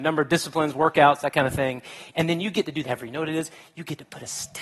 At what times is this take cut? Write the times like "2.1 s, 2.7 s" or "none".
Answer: 2.8 s